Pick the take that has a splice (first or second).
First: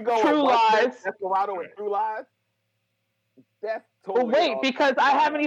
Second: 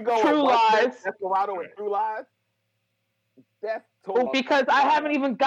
second